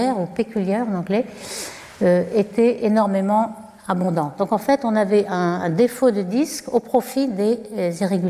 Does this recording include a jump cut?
no; 0 cuts

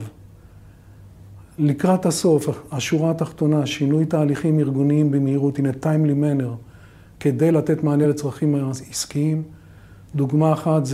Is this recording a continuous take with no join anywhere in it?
yes; 0 cuts

